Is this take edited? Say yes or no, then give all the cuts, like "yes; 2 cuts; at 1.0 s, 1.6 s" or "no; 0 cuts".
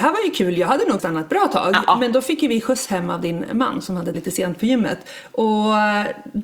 yes; 2 cuts; at 1.0 s, 4.1 s